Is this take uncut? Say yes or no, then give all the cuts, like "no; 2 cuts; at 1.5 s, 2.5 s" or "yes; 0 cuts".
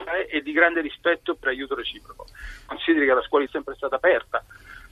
no; 1 cut; at 3.5 s